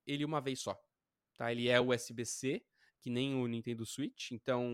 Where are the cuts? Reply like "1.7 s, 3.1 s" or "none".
none